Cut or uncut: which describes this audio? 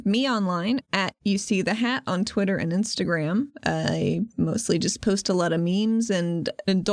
uncut